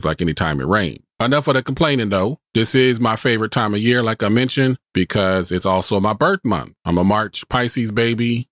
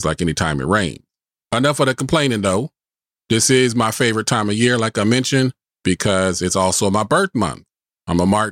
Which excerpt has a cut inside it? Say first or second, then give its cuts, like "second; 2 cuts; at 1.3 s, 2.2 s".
first; 4 cuts; at 1.1 s, 2.4 s, 4.8 s, 6.8 s